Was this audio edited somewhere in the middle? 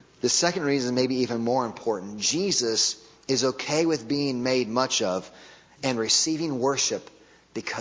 no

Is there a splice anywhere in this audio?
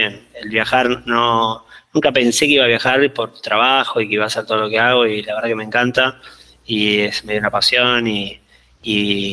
no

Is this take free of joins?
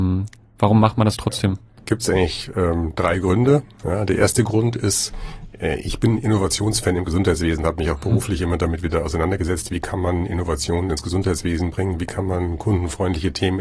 yes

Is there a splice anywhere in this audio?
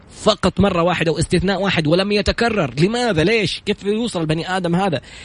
no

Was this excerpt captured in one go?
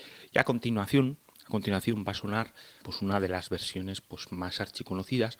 no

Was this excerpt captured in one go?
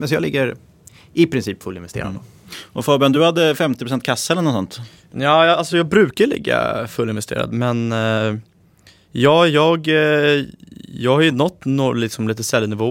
yes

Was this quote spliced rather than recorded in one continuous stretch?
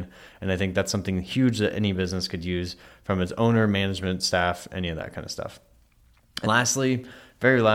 yes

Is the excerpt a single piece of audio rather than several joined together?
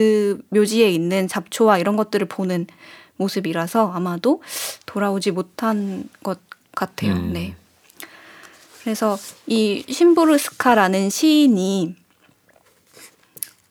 yes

